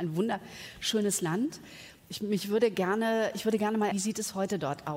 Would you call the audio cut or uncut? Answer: cut